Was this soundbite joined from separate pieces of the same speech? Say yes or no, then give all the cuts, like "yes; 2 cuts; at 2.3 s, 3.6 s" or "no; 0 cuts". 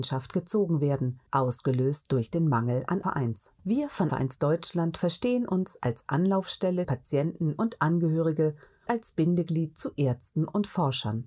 yes; 6 cuts; at 1.3 s, 3.0 s, 3.6 s, 4.1 s, 6.8 s, 8.9 s